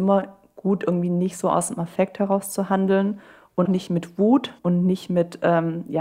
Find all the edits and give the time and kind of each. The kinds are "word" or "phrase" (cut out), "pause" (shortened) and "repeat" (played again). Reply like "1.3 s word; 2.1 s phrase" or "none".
3.6 s word; 4.6 s pause